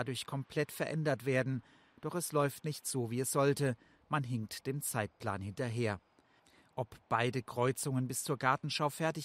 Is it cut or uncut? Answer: uncut